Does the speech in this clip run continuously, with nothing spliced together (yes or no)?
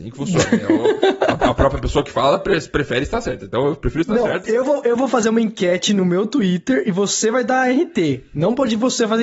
yes